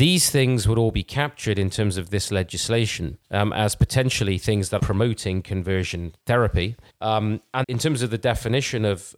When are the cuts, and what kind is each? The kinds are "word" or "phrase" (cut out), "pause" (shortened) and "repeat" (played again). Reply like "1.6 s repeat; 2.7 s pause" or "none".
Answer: 3.2 s pause; 4.8 s word; 6.9 s pause; 7.6 s word